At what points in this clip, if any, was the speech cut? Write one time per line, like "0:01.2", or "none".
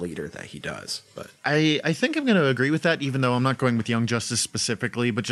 0:01.4